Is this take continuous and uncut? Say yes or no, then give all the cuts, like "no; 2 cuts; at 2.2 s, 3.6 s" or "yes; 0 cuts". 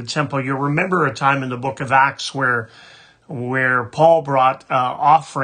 yes; 0 cuts